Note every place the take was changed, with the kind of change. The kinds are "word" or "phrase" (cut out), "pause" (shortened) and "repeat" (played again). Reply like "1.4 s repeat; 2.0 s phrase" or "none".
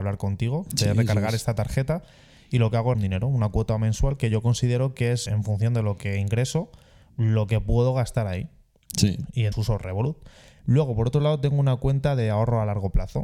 2.9 s word; 5.3 s word; 9.5 s word